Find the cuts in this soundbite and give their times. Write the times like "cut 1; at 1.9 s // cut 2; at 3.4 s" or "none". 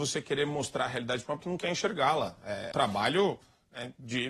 cut 1; at 1.4 s // cut 2; at 2.7 s